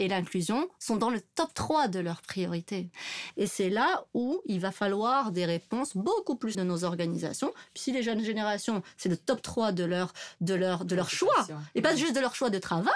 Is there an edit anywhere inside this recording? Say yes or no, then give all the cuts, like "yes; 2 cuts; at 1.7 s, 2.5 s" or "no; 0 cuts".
yes; 1 cut; at 6.5 s